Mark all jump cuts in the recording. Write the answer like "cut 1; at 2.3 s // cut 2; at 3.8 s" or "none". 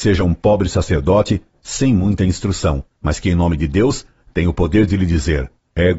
none